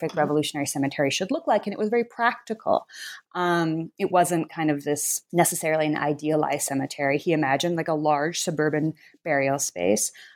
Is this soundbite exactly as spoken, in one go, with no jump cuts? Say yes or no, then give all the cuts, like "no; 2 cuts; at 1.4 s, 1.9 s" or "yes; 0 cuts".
yes; 0 cuts